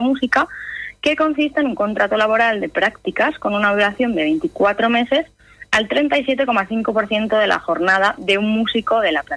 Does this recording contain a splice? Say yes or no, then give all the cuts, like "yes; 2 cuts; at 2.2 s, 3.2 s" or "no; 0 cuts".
no; 0 cuts